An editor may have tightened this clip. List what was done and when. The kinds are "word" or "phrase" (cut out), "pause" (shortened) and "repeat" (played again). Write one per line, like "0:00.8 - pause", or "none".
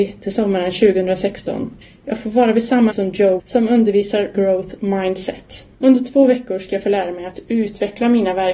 0:01.8 - pause
0:02.9 - word
0:03.4 - word
0:04.3 - phrase
0:05.7 - pause